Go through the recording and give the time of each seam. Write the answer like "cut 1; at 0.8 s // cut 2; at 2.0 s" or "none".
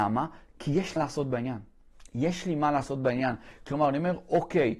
cut 1; at 1.0 s